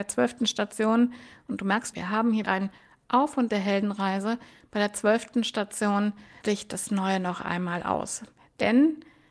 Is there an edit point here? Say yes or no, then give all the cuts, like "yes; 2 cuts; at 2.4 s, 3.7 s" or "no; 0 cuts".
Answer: yes; 4 cuts; at 1.9 s, 2.4 s, 3.5 s, 6.4 s